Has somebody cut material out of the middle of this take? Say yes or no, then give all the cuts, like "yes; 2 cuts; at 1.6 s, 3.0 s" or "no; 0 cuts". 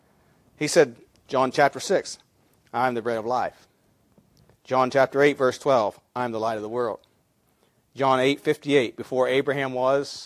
no; 0 cuts